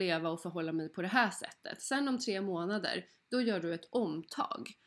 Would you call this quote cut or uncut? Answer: uncut